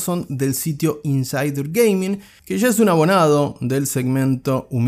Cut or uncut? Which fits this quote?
uncut